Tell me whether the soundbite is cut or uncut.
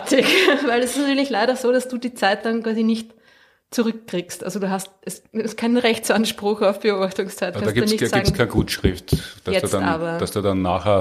uncut